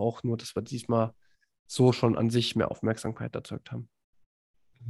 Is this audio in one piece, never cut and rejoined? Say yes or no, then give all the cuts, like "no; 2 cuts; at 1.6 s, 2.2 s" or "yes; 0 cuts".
yes; 0 cuts